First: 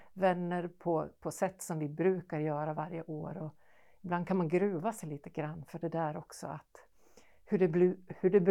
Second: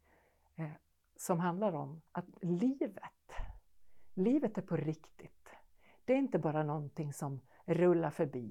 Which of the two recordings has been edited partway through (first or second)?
second